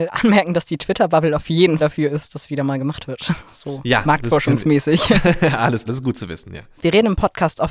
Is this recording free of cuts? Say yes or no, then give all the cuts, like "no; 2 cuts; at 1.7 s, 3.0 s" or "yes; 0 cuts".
no; 3 cuts; at 1.8 s, 2.3 s, 5.9 s